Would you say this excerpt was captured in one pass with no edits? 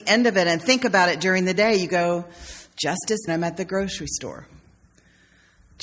no; 1 cut; at 3.3 s

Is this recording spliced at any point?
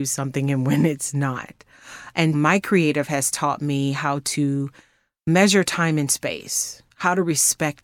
yes; 1 cut; at 2.3 s

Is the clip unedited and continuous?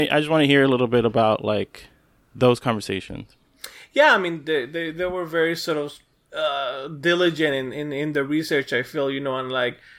yes; 0 cuts

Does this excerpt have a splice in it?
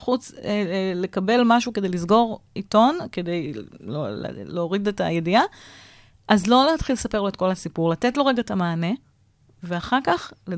no; 0 cuts

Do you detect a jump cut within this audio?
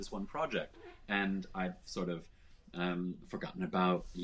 no; 0 cuts

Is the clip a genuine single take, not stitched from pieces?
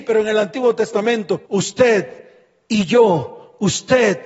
no; 1 cut; at 1.5 s

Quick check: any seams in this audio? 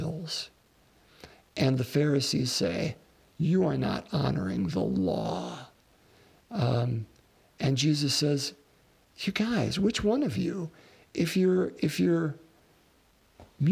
no; 0 cuts

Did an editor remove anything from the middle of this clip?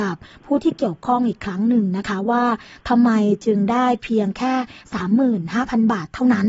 no; 0 cuts

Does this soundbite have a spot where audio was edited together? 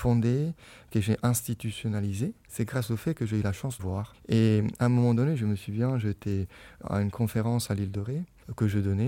yes; 2 cuts; at 3.8 s, 6.8 s

